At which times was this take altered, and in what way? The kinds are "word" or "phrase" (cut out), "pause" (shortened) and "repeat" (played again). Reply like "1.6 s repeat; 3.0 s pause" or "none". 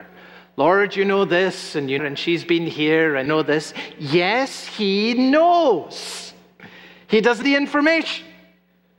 2.0 s phrase; 3.3 s word; 7.4 s word